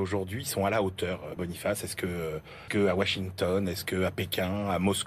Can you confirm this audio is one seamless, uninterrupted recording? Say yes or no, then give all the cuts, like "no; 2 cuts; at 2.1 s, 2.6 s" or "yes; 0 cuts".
no; 2 cuts; at 1.4 s, 2.7 s